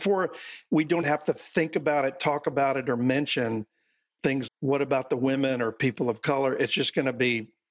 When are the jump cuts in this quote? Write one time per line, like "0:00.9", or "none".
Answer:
0:01.0
0:04.5